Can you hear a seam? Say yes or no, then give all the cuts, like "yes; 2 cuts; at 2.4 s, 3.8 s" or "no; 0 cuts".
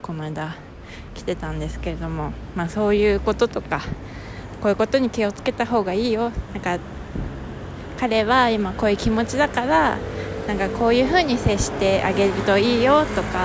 yes; 1 cut; at 6.5 s